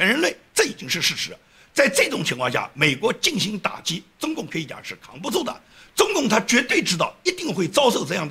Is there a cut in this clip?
no; 0 cuts

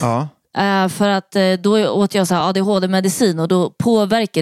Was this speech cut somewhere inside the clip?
no; 0 cuts

